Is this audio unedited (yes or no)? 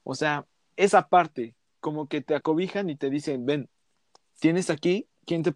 yes